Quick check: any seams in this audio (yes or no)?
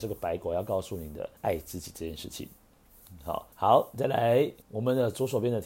yes